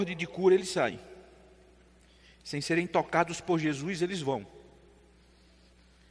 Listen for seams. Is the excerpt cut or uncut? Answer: uncut